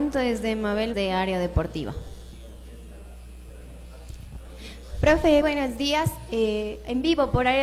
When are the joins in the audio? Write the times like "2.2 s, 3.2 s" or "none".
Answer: 0.9 s, 5.4 s